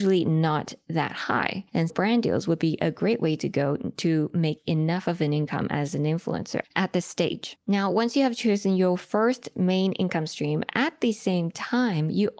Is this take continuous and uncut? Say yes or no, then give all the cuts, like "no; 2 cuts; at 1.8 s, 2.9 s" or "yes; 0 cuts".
no; 1 cut; at 1.9 s